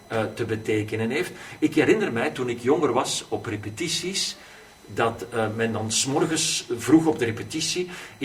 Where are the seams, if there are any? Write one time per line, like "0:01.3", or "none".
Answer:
none